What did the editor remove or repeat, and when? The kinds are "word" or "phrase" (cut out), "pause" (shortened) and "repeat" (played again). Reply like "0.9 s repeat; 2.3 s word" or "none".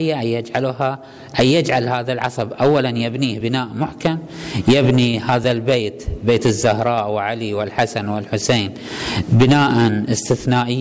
none